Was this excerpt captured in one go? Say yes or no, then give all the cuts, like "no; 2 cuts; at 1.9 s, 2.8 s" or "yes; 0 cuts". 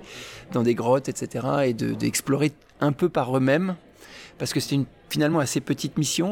yes; 0 cuts